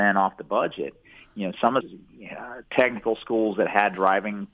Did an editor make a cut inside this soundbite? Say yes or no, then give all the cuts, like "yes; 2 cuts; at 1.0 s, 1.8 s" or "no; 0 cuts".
yes; 1 cut; at 1.8 s